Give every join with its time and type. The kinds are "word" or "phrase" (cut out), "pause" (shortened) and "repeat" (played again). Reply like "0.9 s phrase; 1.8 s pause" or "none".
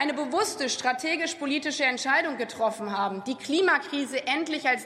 none

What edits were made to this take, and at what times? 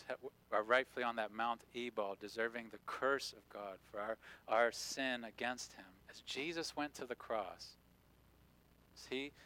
6.0 s pause

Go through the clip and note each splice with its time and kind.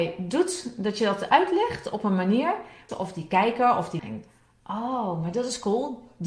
2.9 s phrase; 4.0 s word

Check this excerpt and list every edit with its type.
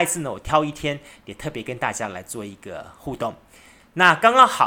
none

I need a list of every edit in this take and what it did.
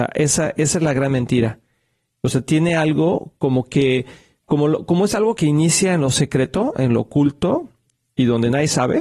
5.4 s word

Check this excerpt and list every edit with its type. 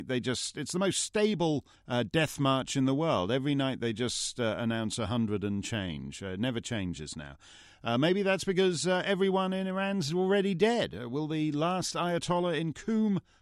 1.7 s pause

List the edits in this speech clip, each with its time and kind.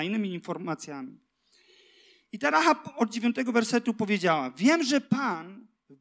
none

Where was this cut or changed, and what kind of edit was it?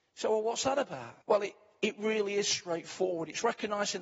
1.2 s pause

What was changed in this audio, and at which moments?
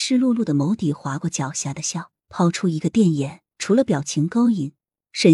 2.2 s pause; 3.5 s pause

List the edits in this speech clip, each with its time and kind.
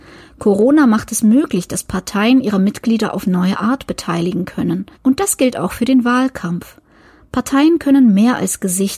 4.9 s pause

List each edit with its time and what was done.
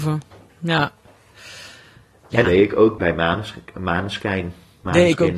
2.4 s word; 3.0 s word

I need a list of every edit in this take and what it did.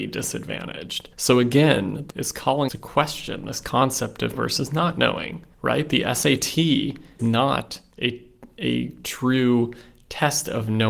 1.1 s pause; 2.1 s word; 2.7 s word; 4.4 s word; 5.5 s pause; 7.2 s word

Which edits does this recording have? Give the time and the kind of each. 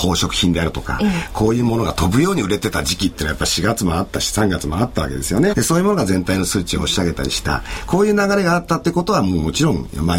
5.5 s phrase

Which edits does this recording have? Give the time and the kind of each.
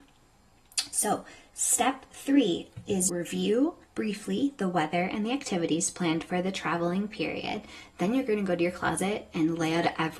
3.1 s phrase; 3.8 s pause

